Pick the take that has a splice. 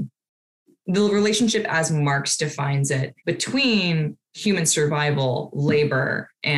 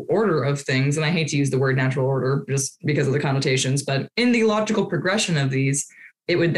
first; 1 cut; at 3.2 s

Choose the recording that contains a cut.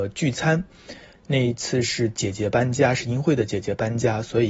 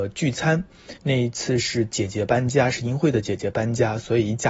second; 1 cut; at 1.0 s

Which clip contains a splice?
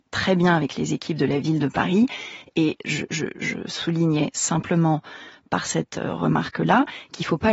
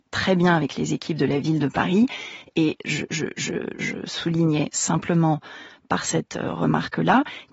first; 1 cut; at 3.3 s

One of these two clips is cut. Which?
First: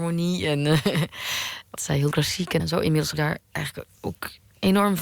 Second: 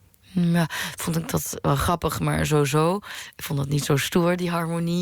first; 4 cuts; at 1.8 s, 2.1 s, 2.6 s, 3.1 s

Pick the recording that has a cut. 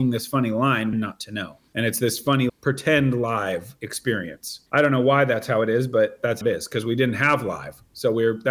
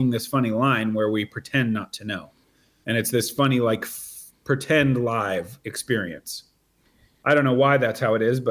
first; 5 cuts; at 0.9 s, 1.7 s, 2.5 s, 4.7 s, 6.4 s

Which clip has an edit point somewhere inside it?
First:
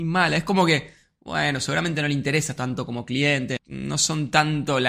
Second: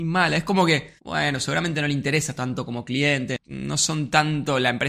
second; 1 cut; at 1.0 s

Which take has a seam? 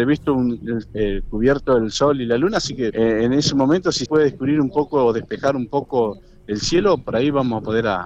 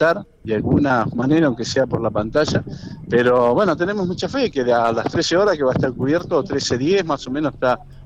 first; 2 cuts; at 2.9 s, 4.1 s

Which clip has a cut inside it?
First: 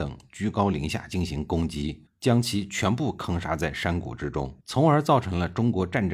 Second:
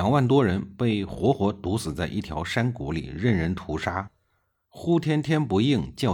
first; 2 cuts; at 2.1 s, 4.6 s

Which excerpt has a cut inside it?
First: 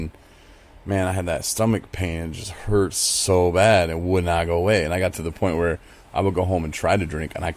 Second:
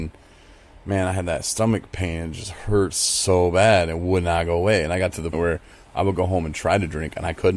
second; 1 cut; at 5.3 s

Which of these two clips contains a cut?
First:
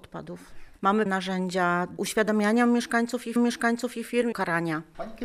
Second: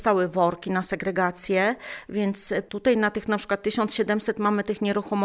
first; 4 cuts; at 1.1 s, 2.0 s, 3.4 s, 4.3 s

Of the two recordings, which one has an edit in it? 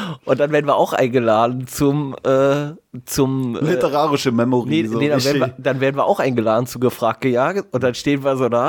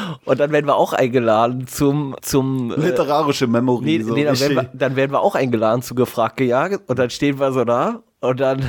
second; 1 cut; at 2.2 s

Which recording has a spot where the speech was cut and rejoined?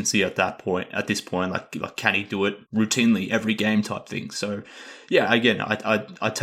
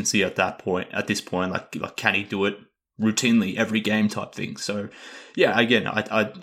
first; 1 cut; at 2.6 s

